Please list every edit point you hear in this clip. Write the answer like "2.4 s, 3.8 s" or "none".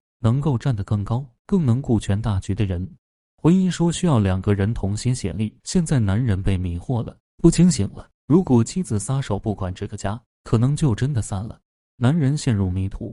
1.5 s, 5.6 s